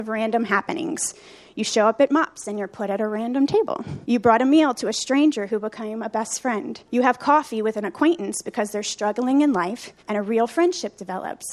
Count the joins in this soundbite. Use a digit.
3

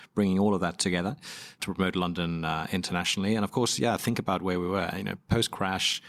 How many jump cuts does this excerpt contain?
0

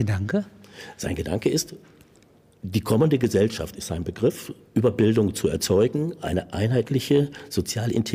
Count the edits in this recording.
0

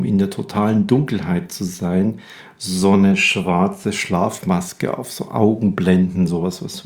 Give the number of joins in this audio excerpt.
0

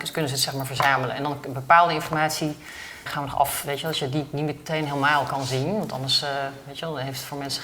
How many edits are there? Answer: 1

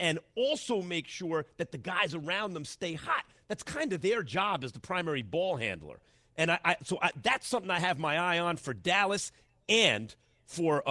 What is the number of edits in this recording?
0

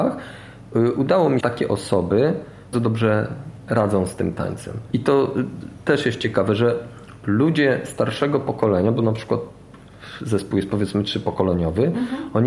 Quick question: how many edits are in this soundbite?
2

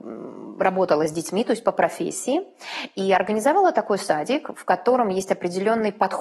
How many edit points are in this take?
0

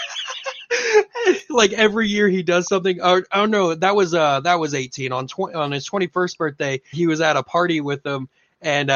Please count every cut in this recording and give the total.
1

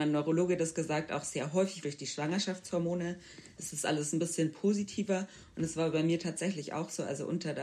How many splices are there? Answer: 1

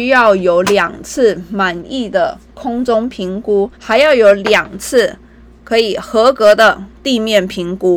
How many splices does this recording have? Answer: 1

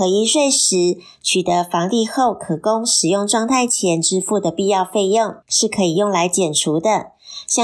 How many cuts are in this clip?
1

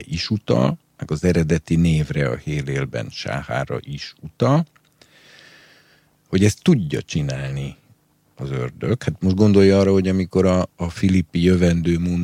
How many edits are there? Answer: 0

